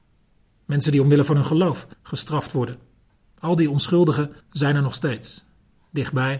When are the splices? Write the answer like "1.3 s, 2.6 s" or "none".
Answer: 1.9 s, 3.1 s, 4.4 s